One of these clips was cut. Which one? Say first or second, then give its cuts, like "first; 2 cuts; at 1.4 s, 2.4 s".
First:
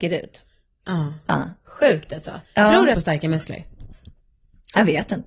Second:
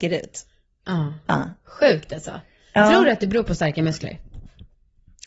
first; 2 cuts; at 2.4 s, 2.9 s